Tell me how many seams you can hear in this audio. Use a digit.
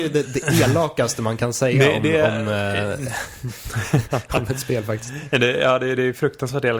0